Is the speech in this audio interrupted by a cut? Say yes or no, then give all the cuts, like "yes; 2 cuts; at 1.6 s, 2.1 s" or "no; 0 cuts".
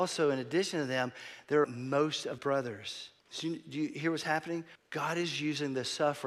yes; 4 cuts; at 1.6 s, 2.4 s, 3.2 s, 4.8 s